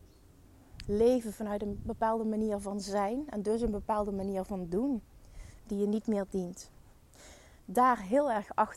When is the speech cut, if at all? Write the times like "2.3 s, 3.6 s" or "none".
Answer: none